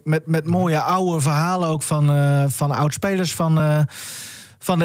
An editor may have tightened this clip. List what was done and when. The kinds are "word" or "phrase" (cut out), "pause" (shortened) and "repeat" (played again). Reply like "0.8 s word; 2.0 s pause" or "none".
none